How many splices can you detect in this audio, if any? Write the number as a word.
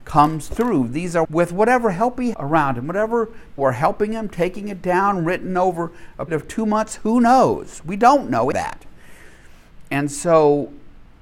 five